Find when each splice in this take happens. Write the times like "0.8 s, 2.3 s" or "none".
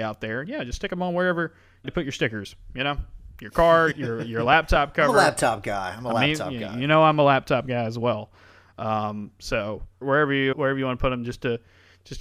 1.8 s, 3.9 s, 10.0 s, 10.5 s